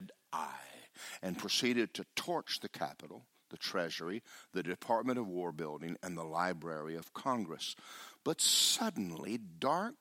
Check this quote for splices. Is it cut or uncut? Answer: uncut